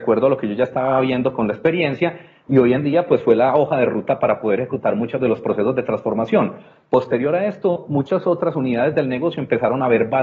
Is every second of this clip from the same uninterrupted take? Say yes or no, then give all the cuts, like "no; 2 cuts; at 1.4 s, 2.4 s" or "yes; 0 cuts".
yes; 0 cuts